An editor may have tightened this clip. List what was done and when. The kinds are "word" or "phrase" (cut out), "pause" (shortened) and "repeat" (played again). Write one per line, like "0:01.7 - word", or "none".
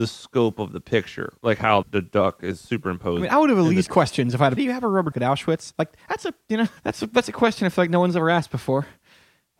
0:01.4 - pause
0:01.8 - word
0:03.9 - word
0:04.6 - phrase
0:05.1 - word
0:06.8 - pause